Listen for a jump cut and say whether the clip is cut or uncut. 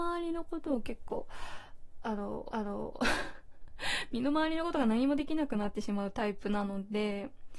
cut